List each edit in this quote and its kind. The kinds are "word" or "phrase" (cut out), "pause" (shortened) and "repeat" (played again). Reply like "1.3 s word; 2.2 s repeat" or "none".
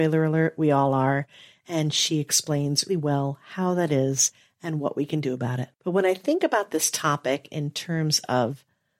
2.9 s word; 5.7 s pause